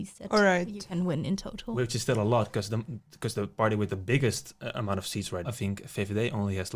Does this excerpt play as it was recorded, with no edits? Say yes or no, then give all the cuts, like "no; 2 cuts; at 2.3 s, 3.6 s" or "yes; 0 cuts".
no; 2 cuts; at 1.9 s, 5.4 s